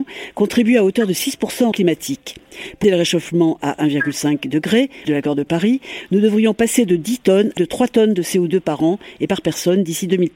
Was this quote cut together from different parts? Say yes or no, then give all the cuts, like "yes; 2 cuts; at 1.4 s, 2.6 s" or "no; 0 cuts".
yes; 4 cuts; at 1.7 s, 2.8 s, 5.0 s, 7.6 s